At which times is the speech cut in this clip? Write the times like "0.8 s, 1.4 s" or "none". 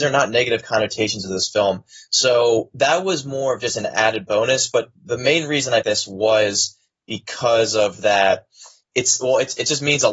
5.8 s